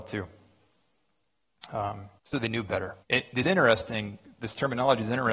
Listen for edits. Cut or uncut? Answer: cut